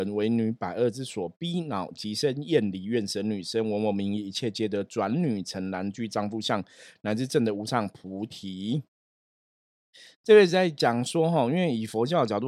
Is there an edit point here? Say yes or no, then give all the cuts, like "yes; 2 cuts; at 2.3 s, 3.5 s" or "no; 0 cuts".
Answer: no; 0 cuts